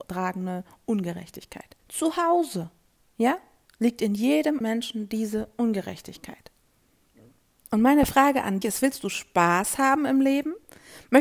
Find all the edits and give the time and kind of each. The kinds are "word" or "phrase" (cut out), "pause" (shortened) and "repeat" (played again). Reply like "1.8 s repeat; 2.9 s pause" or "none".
1.8 s pause; 3.7 s pause; 4.6 s word; 8.6 s word